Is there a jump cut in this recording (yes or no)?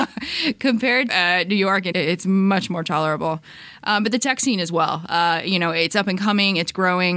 yes